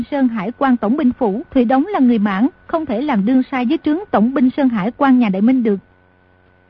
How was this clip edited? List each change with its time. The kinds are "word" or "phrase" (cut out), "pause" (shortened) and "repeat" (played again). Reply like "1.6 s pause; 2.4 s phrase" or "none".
1.5 s pause; 2.5 s pause